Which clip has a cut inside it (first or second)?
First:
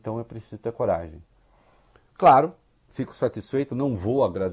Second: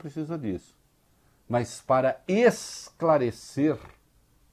first